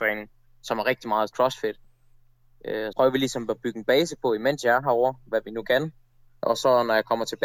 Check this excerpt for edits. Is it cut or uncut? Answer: cut